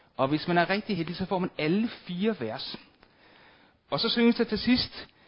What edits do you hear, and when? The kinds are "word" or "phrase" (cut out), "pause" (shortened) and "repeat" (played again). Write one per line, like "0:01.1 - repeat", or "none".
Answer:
none